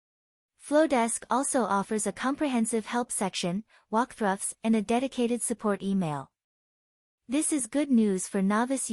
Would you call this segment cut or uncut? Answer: uncut